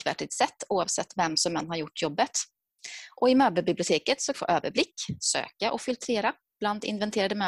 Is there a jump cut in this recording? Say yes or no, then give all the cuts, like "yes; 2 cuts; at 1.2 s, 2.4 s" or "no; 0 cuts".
yes; 1 cut; at 4.3 s